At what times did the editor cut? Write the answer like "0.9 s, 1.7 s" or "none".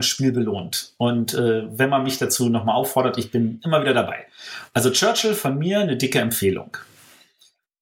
none